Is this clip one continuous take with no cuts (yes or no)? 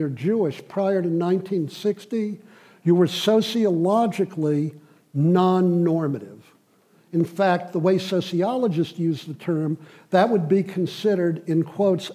yes